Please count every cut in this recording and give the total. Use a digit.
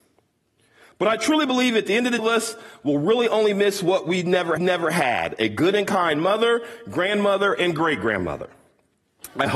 2